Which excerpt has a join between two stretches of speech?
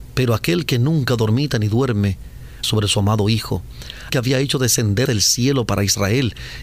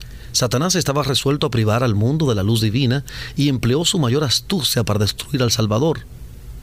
first; 3 cuts; at 2.6 s, 4.1 s, 5.1 s

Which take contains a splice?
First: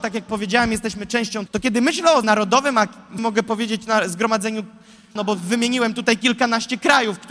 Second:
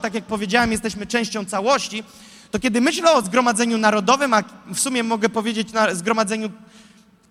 first; 4 cuts; at 1.5 s, 2.2 s, 3.2 s, 5.2 s

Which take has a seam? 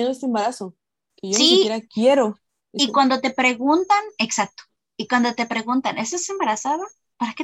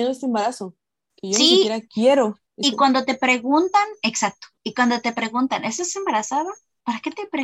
second; 2 cuts; at 2.5 s, 4.6 s

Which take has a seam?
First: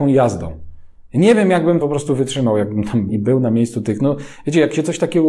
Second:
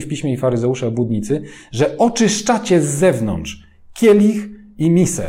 first; 2 cuts; at 1.8 s, 3.1 s

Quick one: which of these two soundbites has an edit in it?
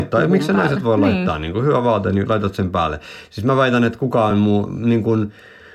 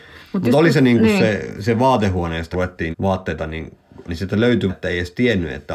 second; 4 cuts; at 2.5 s, 2.9 s, 4.1 s, 4.7 s

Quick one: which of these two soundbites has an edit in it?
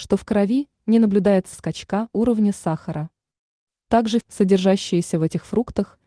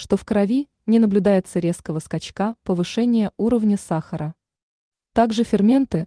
first; 3 cuts; at 1.5 s, 2.1 s, 4.2 s

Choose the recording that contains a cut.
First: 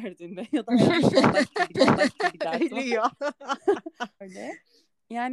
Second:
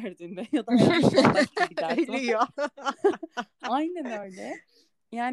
first; 2 cuts; at 1.7 s, 4.2 s

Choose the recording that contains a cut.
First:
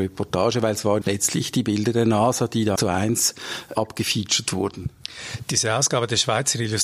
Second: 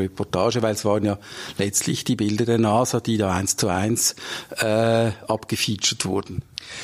first; 3 cuts; at 1.0 s, 2.8 s, 3.7 s

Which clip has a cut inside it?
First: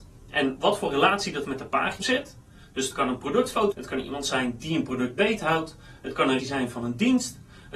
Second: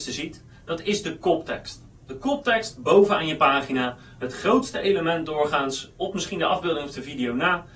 first; 4 cuts; at 1.4 s, 2.0 s, 3.7 s, 6.4 s

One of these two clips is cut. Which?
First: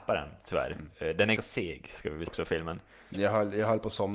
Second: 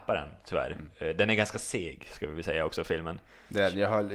first; 3 cuts; at 1.4 s, 2.3 s, 3.1 s

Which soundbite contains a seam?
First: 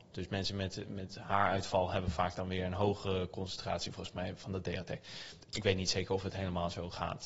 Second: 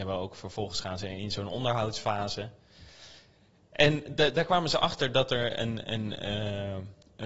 first; 1 cut; at 5.4 s

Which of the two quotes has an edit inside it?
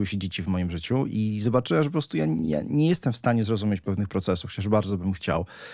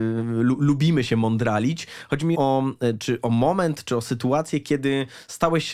second; 1 cut; at 2.3 s

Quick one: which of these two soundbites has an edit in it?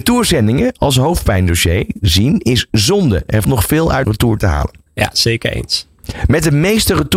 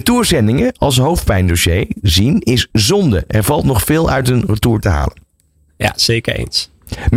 first; 3 cuts; at 3.4 s, 4.0 s, 4.9 s

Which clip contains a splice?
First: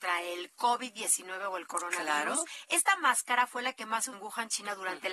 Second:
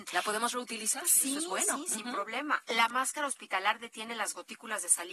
first; 1 cut; at 4.1 s

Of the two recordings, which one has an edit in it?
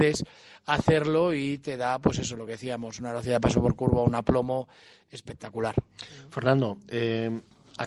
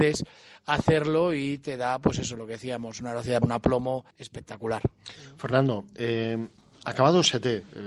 second; 2 cuts; at 3.4 s, 4.1 s

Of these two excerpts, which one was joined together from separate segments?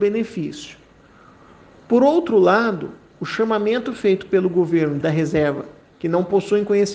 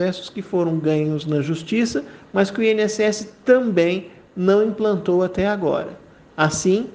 first; 2 cuts; at 5.0 s, 5.9 s

